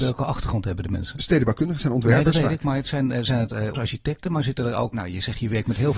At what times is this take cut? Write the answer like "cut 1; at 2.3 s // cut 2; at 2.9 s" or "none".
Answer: cut 1; at 3.7 s // cut 2; at 4.9 s